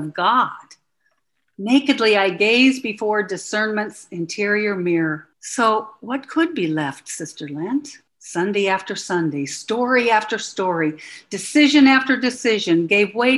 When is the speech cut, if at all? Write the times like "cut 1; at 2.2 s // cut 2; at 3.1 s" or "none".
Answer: cut 1; at 5.3 s // cut 2; at 8.1 s